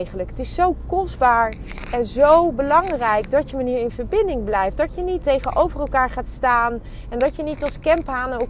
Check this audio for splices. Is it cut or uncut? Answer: cut